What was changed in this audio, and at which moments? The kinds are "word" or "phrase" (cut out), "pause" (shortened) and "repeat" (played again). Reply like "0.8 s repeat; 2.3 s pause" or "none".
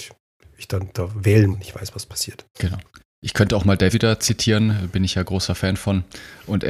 1.5 s word; 2.5 s pause; 3.9 s word